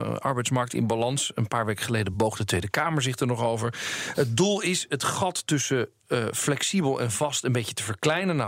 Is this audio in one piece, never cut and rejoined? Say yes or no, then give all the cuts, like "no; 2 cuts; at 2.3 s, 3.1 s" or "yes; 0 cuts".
yes; 0 cuts